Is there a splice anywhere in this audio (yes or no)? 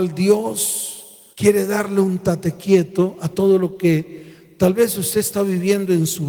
yes